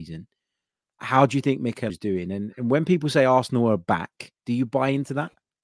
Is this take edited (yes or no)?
yes